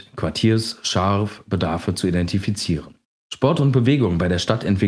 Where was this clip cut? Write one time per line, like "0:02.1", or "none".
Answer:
0:03.0